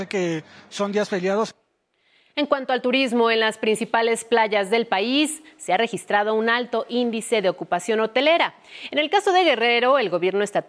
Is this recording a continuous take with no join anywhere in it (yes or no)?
yes